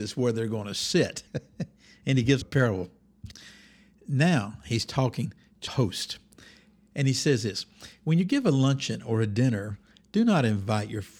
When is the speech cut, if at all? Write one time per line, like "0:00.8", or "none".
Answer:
0:01.3
0:02.4
0:05.7